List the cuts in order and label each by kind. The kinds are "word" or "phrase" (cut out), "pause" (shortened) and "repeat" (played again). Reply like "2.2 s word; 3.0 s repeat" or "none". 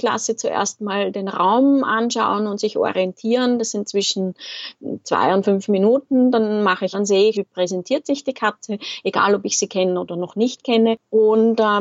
6.9 s phrase; 7.3 s word